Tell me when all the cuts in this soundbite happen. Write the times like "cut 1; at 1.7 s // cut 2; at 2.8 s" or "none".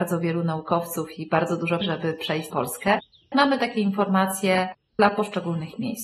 cut 1; at 1.8 s // cut 2; at 2.5 s